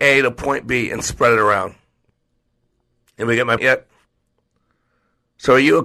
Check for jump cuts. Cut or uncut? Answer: cut